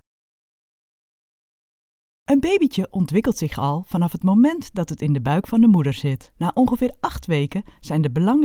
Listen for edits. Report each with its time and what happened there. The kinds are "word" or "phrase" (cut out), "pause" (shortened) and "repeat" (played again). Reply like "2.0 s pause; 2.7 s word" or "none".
6.4 s pause